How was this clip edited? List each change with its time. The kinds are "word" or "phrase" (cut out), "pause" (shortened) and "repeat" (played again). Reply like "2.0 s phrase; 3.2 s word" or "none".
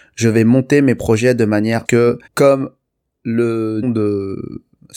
1.9 s phrase; 2.3 s pause; 3.8 s word